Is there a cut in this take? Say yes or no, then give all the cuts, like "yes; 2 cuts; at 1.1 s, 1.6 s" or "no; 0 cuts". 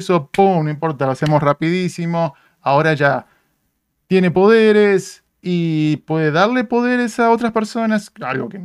no; 0 cuts